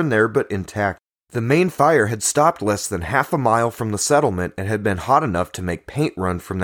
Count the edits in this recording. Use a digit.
1